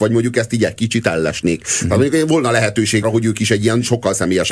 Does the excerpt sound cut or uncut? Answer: cut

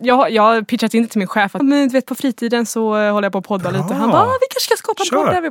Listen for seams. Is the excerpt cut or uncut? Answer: cut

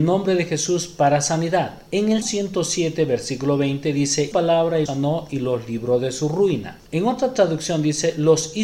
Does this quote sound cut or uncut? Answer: cut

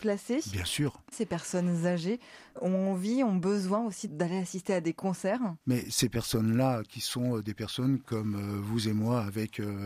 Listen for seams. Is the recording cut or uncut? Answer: cut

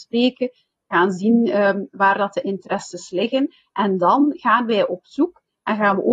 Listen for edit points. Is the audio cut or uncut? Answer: uncut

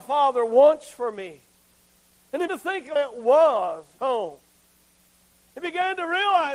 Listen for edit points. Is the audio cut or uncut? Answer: cut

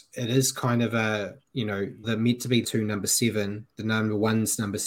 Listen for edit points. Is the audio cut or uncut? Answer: cut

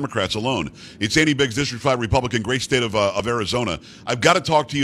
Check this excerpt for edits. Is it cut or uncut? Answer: uncut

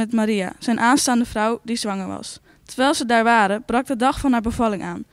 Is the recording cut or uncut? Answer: cut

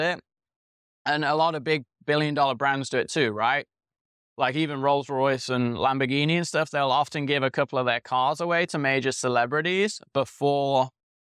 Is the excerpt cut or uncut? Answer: uncut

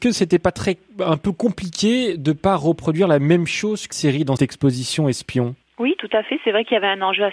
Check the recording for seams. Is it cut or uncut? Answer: cut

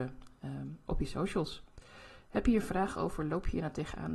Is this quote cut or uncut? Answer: uncut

